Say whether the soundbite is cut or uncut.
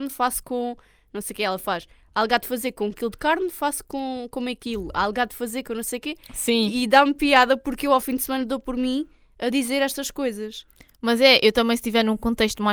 uncut